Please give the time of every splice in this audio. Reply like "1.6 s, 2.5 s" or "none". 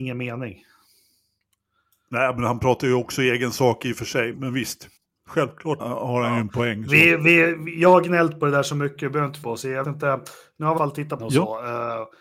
4.3 s, 5.8 s, 9.4 s, 9.8 s, 10.8 s, 11.2 s